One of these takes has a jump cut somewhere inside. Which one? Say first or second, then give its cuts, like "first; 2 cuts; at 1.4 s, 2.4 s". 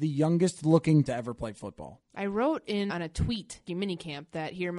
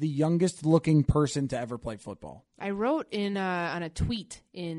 first; 3 cuts; at 1.1 s, 2.9 s, 3.7 s